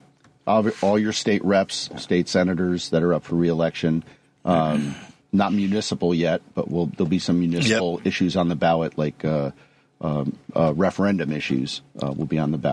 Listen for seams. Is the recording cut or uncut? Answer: uncut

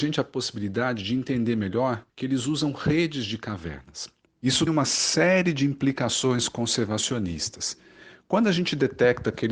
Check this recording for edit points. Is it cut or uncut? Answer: cut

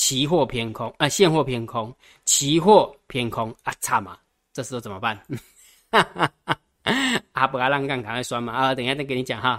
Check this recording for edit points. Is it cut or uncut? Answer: uncut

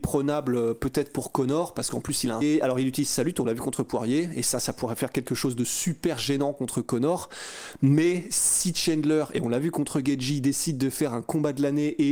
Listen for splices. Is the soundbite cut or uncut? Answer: cut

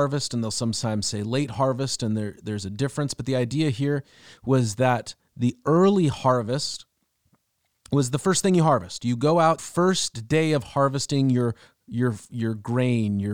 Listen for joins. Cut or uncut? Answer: cut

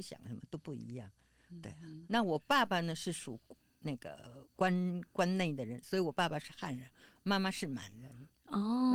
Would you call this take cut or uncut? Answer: cut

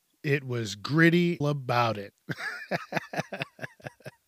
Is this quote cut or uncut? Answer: cut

